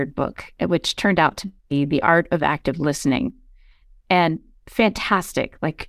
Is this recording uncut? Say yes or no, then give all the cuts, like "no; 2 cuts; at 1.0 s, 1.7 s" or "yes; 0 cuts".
no; 1 cut; at 1.6 s